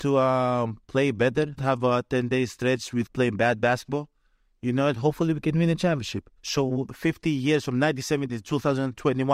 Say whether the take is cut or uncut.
cut